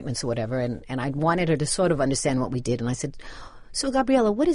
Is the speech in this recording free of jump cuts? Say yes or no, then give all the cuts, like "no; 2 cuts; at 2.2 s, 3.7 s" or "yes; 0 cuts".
yes; 0 cuts